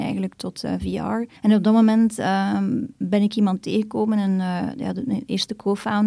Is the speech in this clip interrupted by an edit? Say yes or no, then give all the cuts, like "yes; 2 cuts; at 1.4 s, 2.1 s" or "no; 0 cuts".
yes; 1 cut; at 1.4 s